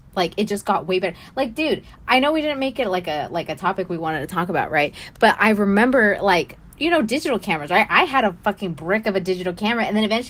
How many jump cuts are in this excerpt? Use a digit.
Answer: 0